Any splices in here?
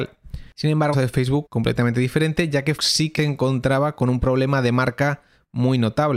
yes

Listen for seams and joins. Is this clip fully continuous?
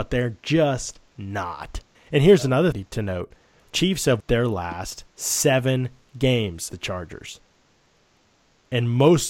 no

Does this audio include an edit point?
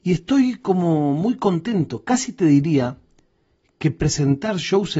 no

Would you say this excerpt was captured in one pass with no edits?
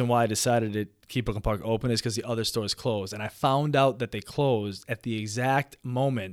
yes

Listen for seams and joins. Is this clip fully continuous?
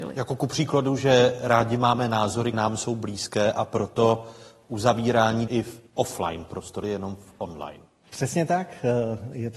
no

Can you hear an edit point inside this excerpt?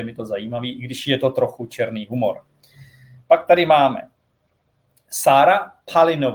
no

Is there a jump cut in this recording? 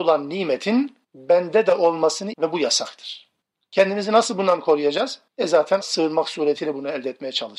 yes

